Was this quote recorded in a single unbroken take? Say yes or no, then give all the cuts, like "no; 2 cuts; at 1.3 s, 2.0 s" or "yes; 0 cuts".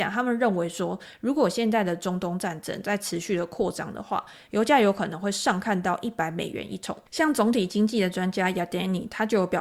no; 1 cut; at 7.1 s